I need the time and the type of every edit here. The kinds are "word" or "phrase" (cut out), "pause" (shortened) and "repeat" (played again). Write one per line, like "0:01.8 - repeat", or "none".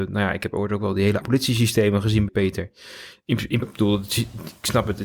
0:01.2 - word
0:02.3 - word
0:03.6 - word